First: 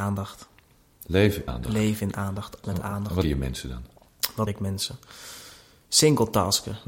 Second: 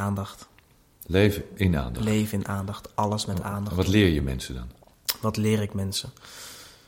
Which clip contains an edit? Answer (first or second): first